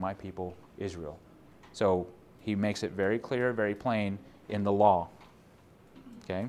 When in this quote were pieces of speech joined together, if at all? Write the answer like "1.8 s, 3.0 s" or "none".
none